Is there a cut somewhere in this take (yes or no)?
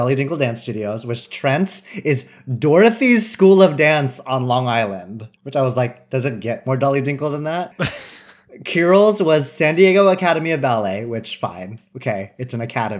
yes